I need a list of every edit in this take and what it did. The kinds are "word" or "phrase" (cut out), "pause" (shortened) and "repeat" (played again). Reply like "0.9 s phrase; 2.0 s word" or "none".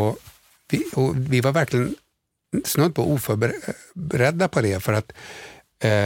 none